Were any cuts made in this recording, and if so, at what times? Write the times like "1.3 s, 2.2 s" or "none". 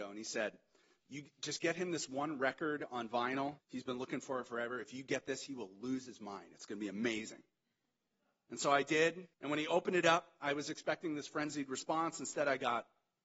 3.6 s, 9.3 s